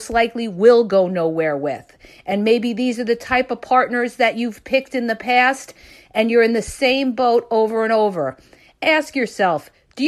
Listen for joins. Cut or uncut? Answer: uncut